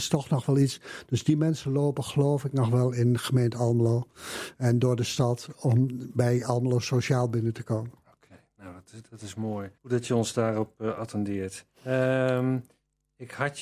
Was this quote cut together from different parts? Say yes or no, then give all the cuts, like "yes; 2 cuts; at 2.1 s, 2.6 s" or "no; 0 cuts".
yes; 2 cuts; at 9.8 s, 11.8 s